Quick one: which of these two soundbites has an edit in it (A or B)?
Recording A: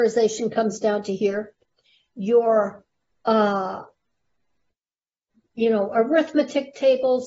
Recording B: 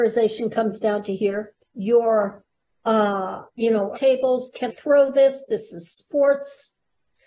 B